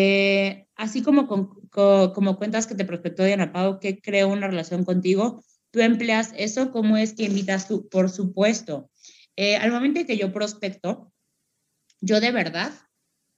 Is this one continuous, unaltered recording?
yes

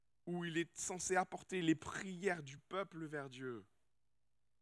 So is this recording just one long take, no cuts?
yes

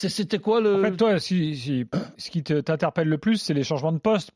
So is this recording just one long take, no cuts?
no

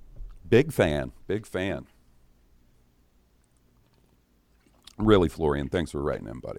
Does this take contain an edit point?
no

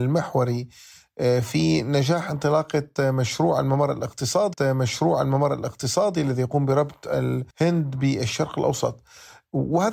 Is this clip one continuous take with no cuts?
no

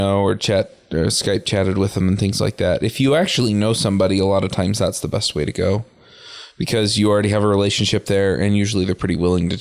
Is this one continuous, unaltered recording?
yes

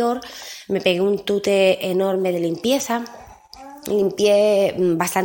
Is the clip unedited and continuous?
yes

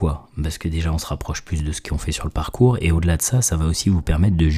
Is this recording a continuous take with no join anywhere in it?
yes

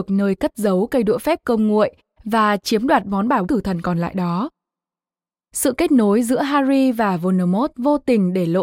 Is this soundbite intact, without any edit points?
no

